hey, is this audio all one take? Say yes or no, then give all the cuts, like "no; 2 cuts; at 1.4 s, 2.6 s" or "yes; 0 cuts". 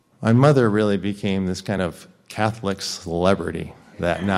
yes; 0 cuts